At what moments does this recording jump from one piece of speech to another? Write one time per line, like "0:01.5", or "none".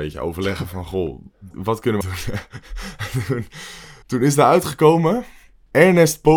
0:01.5
0:02.0
0:04.0

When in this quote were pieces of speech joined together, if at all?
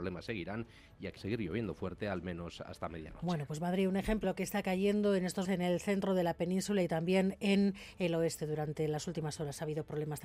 0:01.2
0:04.2
0:05.4

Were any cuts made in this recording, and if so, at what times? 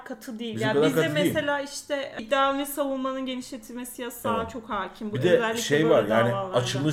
none

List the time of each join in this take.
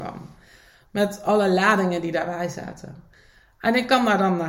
none

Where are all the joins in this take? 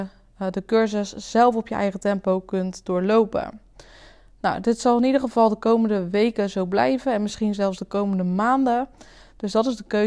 none

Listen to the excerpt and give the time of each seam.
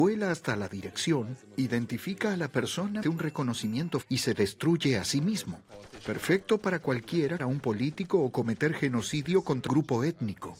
0:03.0
0:04.0
0:07.4
0:09.7

